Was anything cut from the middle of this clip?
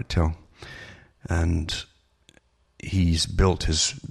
no; 0 cuts

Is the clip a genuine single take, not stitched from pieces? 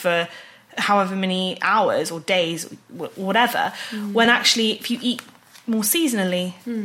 yes; 0 cuts

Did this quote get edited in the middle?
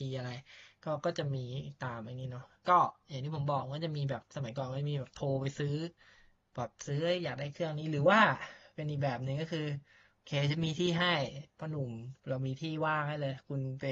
yes; 1 cut; at 12.2 s

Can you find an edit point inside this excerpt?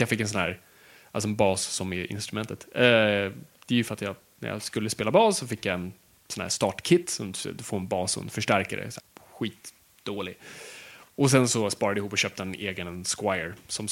yes; 1 cut; at 9.0 s

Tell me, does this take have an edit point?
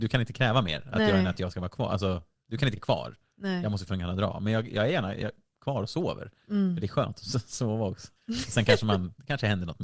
yes; 2 cuts; at 2.8 s, 8.2 s

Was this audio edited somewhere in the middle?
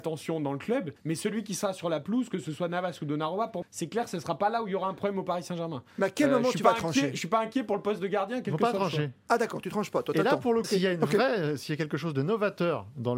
yes; 3 cuts; at 1.0 s, 3.6 s, 10.6 s

